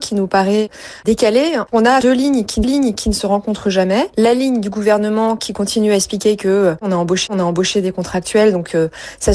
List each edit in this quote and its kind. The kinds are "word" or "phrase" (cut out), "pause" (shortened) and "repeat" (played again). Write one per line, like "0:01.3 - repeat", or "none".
0:02.6 - repeat
0:07.3 - repeat